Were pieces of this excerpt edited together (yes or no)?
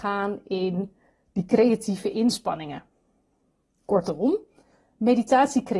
no